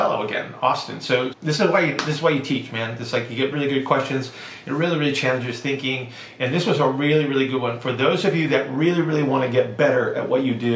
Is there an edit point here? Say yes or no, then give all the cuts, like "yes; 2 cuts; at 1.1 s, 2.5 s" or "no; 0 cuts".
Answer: yes; 2 cuts; at 1.3 s, 3.5 s